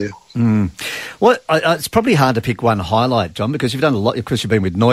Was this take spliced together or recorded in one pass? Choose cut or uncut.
uncut